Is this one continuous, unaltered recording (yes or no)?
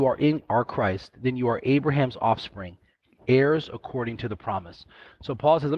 yes